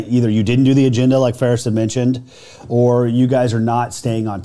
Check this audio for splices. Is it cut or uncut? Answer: uncut